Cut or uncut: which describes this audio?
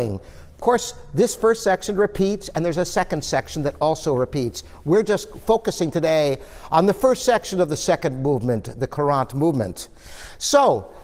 uncut